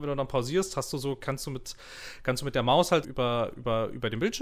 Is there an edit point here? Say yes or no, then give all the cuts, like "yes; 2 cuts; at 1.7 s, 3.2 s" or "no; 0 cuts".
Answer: yes; 1 cut; at 3.0 s